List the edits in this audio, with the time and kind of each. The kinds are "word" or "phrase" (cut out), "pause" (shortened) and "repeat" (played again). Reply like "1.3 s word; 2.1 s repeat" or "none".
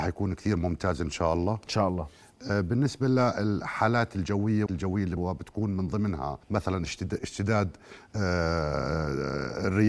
4.7 s word; 5.2 s word; 6.4 s pause